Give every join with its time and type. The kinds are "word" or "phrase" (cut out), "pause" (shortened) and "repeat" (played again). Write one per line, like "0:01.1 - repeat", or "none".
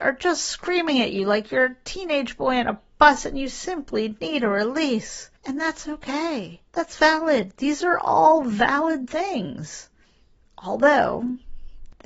0:05.4 - pause
0:06.7 - pause
0:10.4 - pause

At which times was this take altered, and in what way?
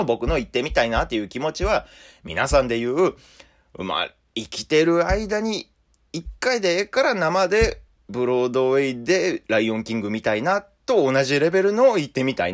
none

